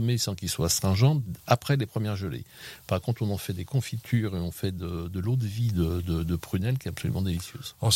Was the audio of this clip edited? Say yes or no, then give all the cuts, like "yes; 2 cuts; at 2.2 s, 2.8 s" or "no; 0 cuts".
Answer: yes; 1 cut; at 1.4 s